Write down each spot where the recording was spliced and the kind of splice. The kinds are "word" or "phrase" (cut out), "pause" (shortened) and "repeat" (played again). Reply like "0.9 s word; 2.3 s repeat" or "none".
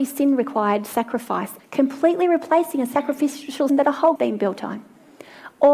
1.6 s word; 3.7 s word; 4.2 s word